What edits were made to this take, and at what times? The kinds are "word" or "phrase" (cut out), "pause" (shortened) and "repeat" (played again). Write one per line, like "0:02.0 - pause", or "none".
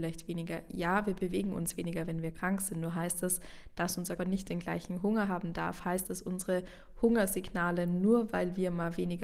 0:04.2 - word
0:06.0 - word